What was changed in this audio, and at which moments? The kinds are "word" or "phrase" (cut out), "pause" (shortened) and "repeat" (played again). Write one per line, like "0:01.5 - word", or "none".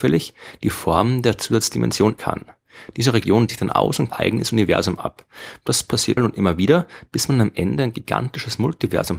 0:02.2 - word
0:03.5 - word
0:04.1 - phrase
0:06.2 - word

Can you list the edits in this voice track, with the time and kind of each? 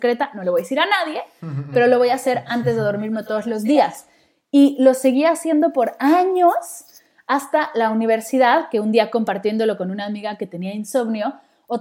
none

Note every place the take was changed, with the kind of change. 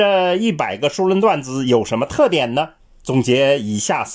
0:02.8 - pause

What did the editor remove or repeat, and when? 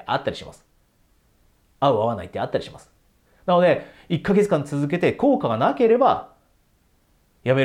none

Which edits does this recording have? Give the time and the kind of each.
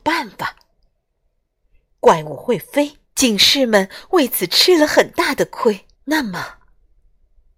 0:03.0 - pause
0:05.9 - pause

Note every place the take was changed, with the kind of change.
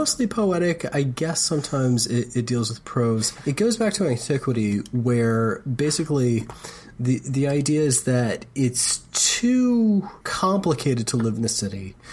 0:10.2 - pause

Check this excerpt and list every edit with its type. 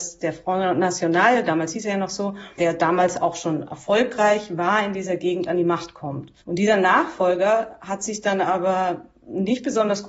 0:06.4 - pause

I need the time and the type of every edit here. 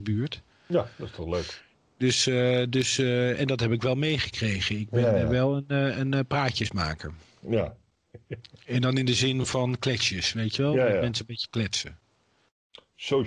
none

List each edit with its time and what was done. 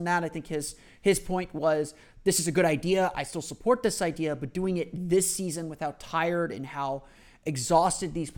none

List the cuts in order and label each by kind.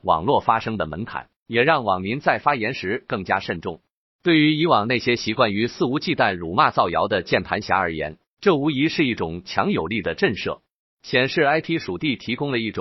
none

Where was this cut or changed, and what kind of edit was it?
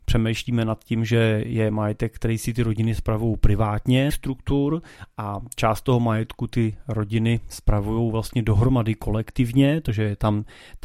0:04.1 - phrase

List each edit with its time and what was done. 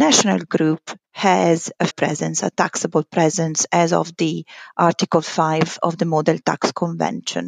0:01.0 - pause
0:01.9 - word

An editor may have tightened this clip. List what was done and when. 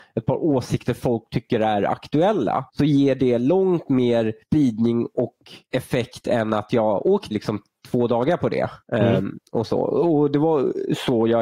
0:02.7 - pause
0:04.4 - pause
0:05.6 - pause
0:07.3 - phrase
0:08.8 - pause

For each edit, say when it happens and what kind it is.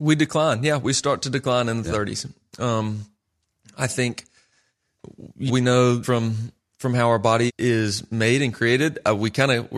0:05.5 - word
0:06.0 - word
0:07.5 - word

